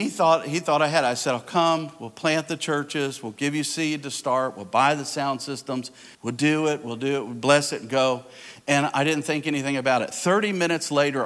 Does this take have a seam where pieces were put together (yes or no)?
yes